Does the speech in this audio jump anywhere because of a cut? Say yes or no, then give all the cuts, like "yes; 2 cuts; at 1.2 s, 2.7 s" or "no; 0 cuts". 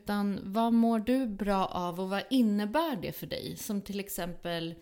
no; 0 cuts